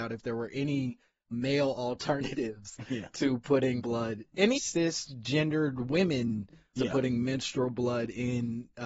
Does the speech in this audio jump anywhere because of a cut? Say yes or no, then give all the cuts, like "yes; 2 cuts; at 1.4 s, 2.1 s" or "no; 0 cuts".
yes; 4 cuts; at 1.3 s, 3.8 s, 4.5 s, 6.7 s